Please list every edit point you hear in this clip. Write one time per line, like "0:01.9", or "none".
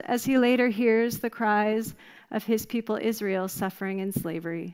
none